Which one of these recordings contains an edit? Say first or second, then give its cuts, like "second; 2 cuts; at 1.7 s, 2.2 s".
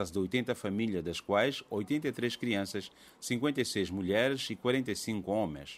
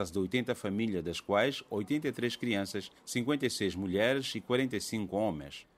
second; 1 cut; at 3.0 s